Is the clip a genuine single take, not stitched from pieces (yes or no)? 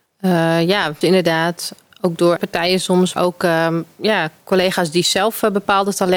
no